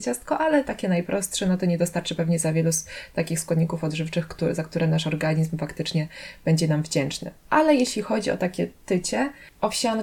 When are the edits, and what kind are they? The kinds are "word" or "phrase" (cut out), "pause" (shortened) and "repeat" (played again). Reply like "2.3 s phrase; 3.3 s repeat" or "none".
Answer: none